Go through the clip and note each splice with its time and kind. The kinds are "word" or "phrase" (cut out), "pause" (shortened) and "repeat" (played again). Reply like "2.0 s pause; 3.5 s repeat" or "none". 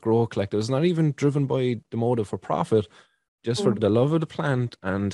3.7 s word